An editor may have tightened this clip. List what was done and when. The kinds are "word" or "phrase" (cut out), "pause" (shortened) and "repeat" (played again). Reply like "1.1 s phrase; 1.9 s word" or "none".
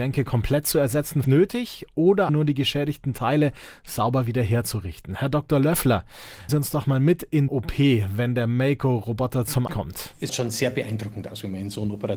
1.2 s word; 2.3 s word; 6.5 s word; 7.5 s word; 9.7 s word; 10.3 s word